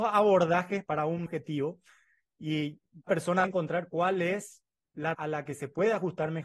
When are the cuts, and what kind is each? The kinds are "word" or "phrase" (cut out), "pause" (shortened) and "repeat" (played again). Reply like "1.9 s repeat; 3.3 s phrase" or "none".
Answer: 1.3 s word; 3.1 s word; 3.4 s word; 5.1 s word